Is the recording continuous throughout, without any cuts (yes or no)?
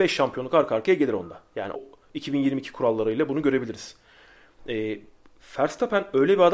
no